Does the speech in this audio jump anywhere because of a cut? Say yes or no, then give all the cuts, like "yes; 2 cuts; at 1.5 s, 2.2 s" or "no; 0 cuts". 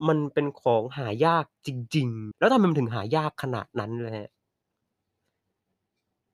yes; 1 cut; at 2.3 s